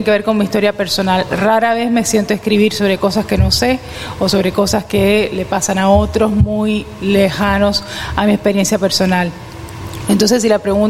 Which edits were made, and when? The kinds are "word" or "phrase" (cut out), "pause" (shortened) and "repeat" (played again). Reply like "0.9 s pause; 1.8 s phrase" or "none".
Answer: none